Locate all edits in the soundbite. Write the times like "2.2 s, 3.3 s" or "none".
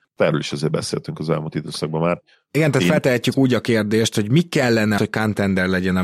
5.0 s

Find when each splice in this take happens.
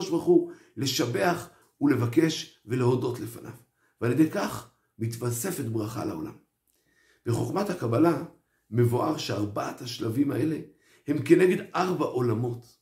none

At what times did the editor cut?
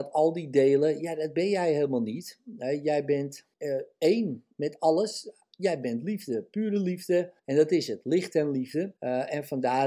3.5 s, 7.4 s, 9.0 s

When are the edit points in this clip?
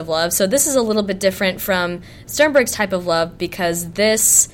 none

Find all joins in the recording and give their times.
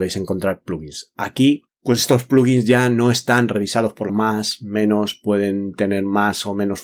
1.7 s, 4.1 s

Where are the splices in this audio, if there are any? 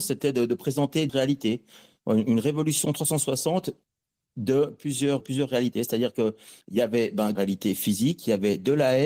1.1 s, 5.2 s, 6.6 s, 7.3 s

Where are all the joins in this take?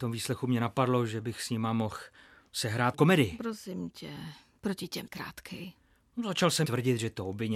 2.9 s, 5.1 s, 6.6 s

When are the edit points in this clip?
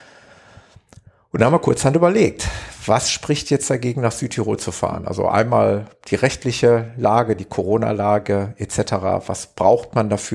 none

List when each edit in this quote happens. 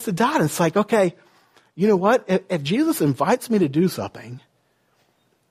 none

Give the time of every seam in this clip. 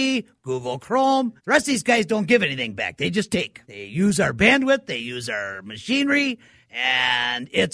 1.4 s, 3.6 s

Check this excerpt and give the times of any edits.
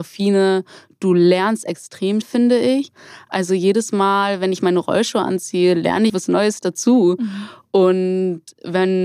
2.2 s, 6.1 s

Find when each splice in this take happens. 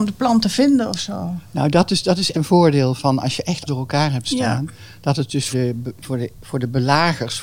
2.3 s, 3.0 s, 3.7 s, 5.5 s

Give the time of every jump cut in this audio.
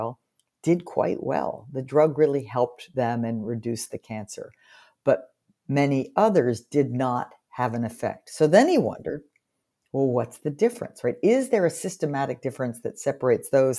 none

